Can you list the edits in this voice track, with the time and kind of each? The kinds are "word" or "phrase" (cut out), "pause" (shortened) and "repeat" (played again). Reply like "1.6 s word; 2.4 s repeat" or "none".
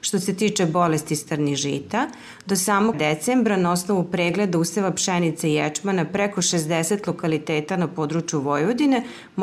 2.9 s word